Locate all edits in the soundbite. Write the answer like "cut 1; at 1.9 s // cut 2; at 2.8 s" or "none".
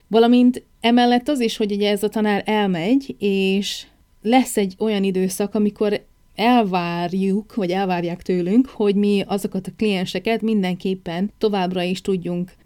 none

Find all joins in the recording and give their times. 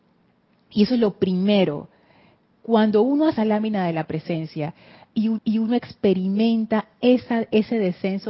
cut 1; at 3.4 s // cut 2; at 5.4 s

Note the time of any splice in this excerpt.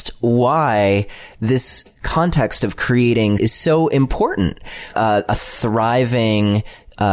cut 1; at 3.4 s // cut 2; at 4.9 s

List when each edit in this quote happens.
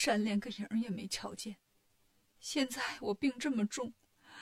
none

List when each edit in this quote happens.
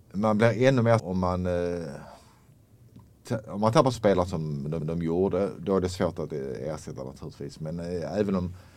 cut 1; at 1.0 s // cut 2; at 3.9 s // cut 3; at 4.8 s

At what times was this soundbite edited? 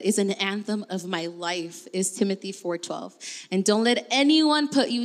none

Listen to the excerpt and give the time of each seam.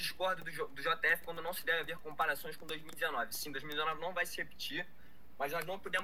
none

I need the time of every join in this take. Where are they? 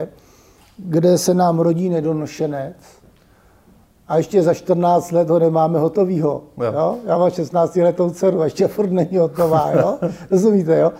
none

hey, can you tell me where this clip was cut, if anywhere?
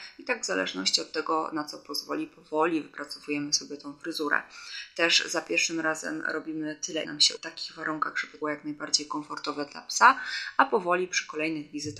cut 1; at 7.0 s // cut 2; at 7.4 s // cut 3; at 8.4 s

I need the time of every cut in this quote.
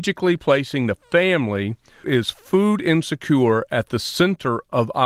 cut 1; at 2.0 s

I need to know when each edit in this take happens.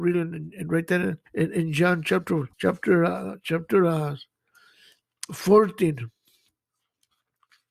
cut 1; at 1.3 s // cut 2; at 2.5 s

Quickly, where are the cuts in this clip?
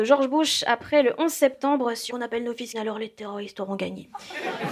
cut 1; at 2.1 s // cut 2; at 2.7 s

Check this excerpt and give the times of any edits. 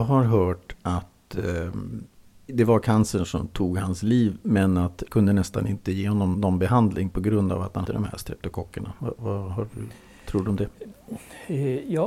cut 1; at 5.1 s // cut 2; at 6.3 s // cut 3; at 7.8 s

